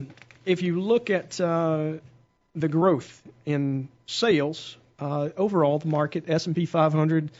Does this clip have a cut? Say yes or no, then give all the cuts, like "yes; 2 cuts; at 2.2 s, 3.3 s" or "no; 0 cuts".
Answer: no; 0 cuts